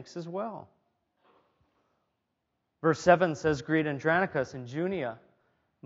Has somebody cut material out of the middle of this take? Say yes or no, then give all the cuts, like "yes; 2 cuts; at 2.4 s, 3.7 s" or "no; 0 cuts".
no; 0 cuts